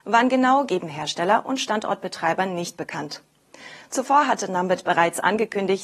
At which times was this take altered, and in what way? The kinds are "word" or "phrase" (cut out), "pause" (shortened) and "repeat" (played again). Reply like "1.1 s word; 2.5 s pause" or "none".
none